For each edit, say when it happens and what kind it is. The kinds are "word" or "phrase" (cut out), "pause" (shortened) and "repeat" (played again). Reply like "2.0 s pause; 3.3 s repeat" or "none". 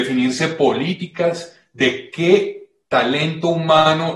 none